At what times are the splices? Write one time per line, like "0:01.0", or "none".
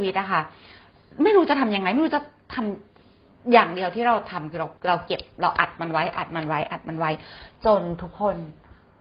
0:04.8

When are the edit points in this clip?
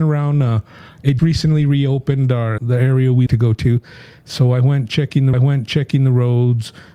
0:01.2
0:02.6
0:03.3
0:05.3

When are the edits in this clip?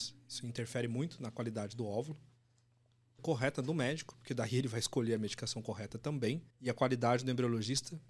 0:03.2
0:06.5

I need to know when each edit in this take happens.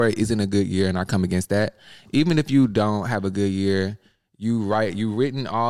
none

